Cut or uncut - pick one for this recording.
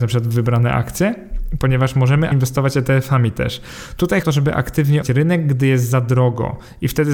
cut